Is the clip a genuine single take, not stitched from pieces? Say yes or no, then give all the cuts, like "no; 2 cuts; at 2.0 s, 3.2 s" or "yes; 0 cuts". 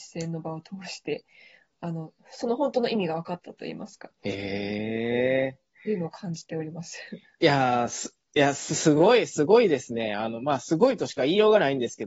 yes; 0 cuts